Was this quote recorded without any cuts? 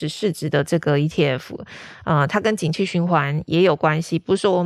yes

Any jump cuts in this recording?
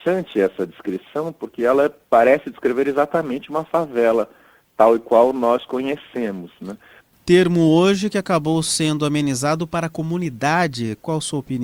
no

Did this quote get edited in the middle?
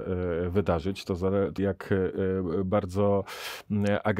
yes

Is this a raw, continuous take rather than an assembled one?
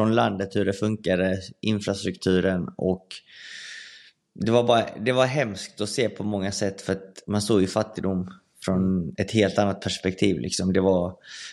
yes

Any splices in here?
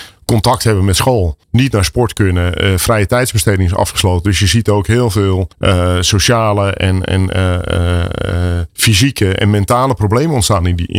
yes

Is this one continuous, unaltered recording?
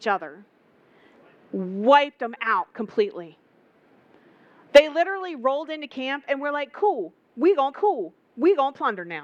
no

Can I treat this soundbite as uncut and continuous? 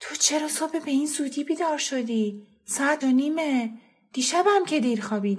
no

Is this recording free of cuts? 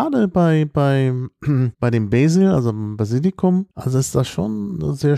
no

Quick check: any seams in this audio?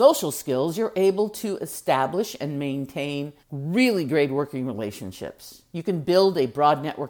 yes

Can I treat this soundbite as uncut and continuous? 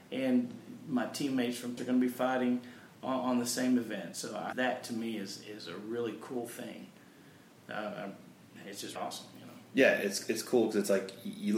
no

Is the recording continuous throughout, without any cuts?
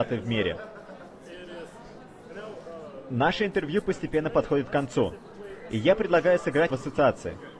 no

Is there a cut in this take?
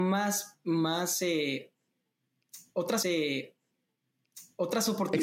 yes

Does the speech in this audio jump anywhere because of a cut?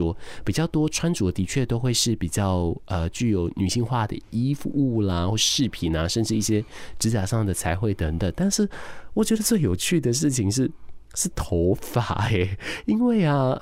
no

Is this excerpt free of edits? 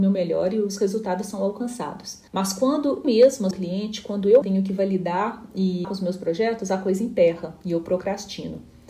no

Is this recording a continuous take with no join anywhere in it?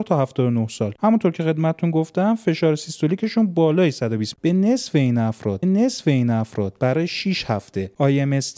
no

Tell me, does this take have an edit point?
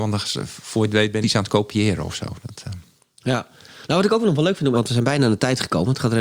yes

